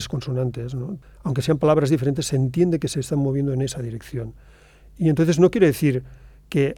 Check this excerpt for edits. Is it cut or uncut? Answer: uncut